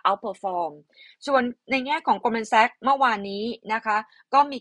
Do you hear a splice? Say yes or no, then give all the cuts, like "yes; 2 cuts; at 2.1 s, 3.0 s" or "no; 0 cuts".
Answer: no; 0 cuts